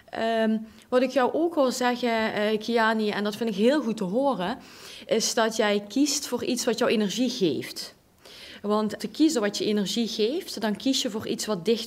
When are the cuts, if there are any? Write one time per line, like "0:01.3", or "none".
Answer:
0:09.0